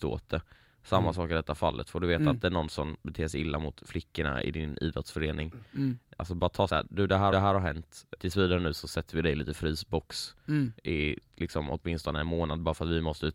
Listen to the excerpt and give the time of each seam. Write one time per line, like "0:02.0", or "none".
0:06.7
0:07.3
0:08.1
0:10.8